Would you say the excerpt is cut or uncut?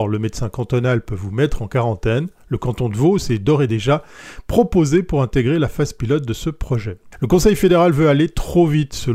uncut